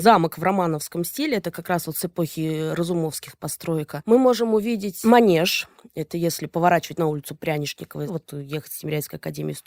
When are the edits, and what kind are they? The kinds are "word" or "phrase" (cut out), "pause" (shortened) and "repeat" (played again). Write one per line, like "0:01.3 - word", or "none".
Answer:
none